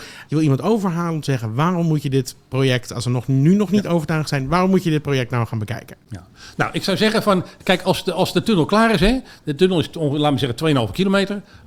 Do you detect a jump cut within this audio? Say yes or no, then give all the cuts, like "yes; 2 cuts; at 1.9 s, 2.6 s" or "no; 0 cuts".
no; 0 cuts